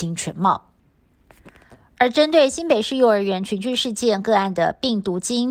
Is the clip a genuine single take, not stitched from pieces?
yes; 0 cuts

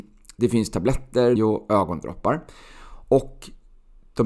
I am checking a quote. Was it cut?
yes; 1 cut; at 1.4 s

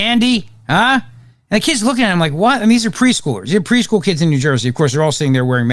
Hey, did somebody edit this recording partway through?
no; 0 cuts

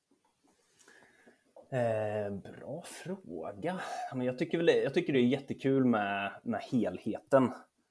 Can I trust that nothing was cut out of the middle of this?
yes; 0 cuts

